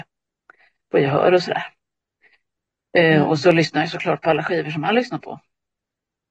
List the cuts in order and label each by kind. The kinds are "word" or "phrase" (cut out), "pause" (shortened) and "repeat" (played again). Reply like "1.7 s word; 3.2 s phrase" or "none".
none